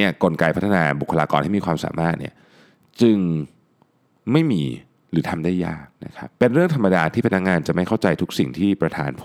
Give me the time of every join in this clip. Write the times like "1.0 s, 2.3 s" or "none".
5.9 s, 6.4 s